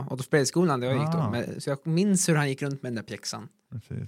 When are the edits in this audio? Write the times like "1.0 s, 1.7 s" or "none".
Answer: none